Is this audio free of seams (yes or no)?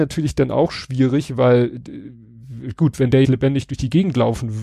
no